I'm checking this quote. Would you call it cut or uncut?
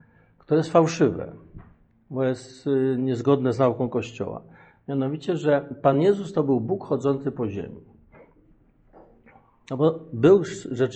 uncut